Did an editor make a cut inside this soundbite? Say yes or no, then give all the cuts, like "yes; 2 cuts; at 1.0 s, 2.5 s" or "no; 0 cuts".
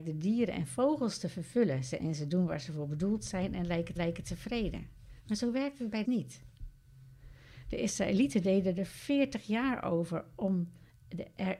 yes; 3 cuts; at 2.0 s, 4.0 s, 6.0 s